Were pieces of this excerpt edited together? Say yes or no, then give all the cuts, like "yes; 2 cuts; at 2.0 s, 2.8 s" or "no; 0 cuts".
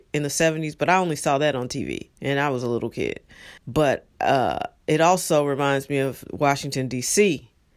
yes; 2 cuts; at 2.1 s, 3.6 s